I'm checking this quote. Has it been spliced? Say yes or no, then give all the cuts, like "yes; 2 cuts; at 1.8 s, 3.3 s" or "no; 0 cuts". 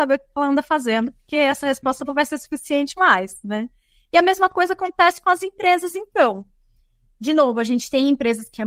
no; 0 cuts